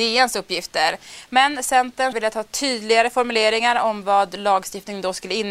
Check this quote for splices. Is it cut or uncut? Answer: cut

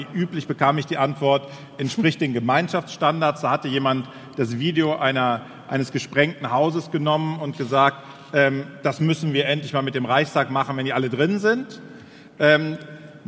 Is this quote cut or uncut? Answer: uncut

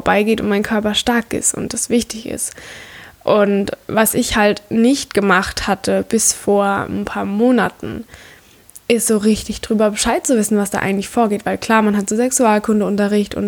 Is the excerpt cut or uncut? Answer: uncut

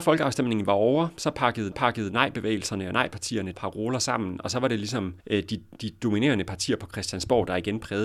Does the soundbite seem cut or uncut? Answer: cut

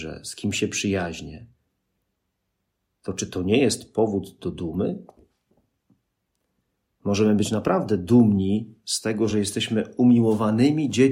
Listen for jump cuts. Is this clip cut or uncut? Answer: uncut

